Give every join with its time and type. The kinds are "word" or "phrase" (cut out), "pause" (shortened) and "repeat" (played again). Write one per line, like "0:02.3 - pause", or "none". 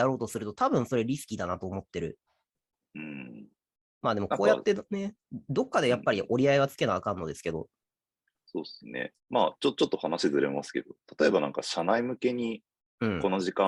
0:09.2 - pause